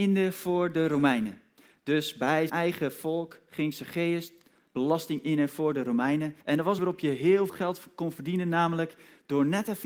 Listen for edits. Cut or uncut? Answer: cut